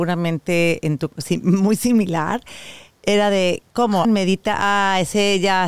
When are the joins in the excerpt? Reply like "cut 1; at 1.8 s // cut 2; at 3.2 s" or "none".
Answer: cut 1; at 1.1 s // cut 2; at 4.0 s